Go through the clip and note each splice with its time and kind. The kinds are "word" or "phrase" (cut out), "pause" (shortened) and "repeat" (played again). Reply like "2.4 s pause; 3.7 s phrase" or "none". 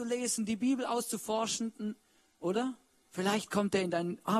none